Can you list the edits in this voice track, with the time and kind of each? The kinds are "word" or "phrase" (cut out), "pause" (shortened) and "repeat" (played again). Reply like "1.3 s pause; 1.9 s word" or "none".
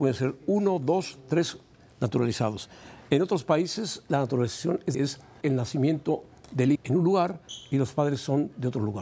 4.9 s word; 5.4 s word; 6.7 s word